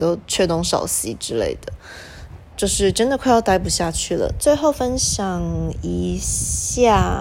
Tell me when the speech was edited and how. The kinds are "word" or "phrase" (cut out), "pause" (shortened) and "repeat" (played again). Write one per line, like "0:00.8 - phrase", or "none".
0:02.5 - word